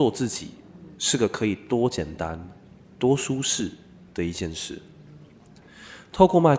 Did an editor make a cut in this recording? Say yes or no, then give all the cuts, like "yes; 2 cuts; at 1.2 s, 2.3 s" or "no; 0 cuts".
no; 0 cuts